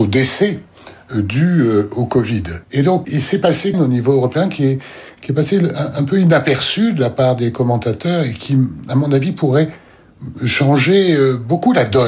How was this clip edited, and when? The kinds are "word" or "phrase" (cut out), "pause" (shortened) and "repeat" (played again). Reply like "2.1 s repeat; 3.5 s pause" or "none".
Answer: 2.6 s pause; 3.0 s word; 3.7 s phrase

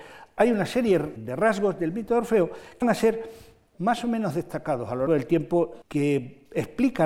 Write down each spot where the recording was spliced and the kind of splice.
1.2 s word; 2.8 s word; 5.1 s word; 5.8 s word

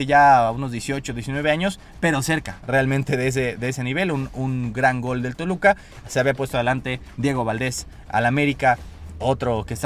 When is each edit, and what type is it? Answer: none

